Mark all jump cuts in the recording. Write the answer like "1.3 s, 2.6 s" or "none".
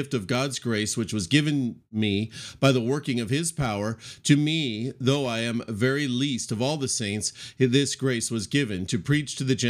none